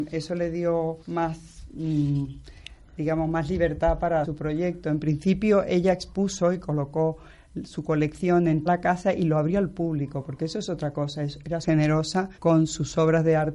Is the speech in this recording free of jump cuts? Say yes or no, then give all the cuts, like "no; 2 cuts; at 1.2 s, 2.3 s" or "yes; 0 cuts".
no; 5 cuts; at 1.0 s, 4.2 s, 8.7 s, 11.6 s, 12.3 s